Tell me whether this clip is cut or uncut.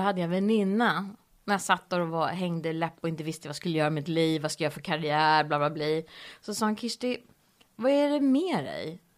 uncut